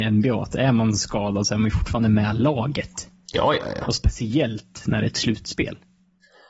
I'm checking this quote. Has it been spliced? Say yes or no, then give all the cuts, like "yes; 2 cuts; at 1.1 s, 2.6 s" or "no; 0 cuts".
no; 0 cuts